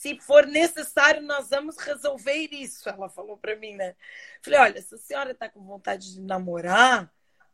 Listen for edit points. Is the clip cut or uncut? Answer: uncut